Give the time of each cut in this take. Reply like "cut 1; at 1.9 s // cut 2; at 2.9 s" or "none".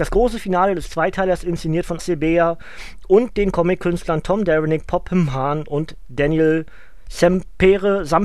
cut 1; at 2.0 s